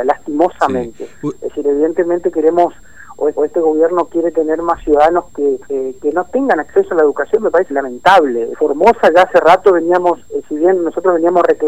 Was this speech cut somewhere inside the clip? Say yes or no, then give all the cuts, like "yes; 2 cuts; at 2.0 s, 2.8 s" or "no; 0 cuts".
yes; 5 cuts; at 3.4 s, 5.7 s, 7.7 s, 8.5 s, 10.2 s